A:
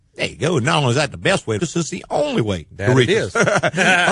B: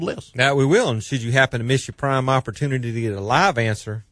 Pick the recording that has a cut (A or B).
A